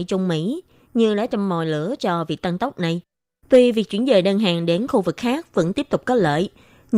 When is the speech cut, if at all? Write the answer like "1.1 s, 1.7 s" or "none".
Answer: none